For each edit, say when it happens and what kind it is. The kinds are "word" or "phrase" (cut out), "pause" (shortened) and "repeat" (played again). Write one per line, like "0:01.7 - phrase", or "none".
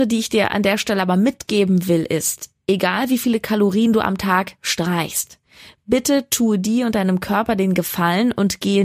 none